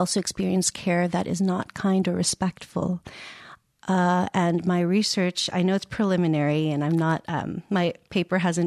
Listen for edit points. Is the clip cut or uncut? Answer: uncut